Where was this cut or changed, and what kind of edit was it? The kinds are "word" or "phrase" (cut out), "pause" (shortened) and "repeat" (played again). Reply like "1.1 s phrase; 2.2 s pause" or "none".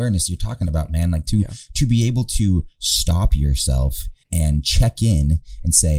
4.2 s pause